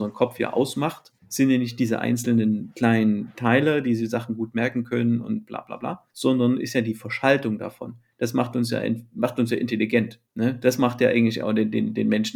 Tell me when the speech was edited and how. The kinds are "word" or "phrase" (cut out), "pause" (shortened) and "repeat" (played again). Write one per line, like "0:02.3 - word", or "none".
0:01.2 - pause
0:06.1 - pause
0:10.3 - pause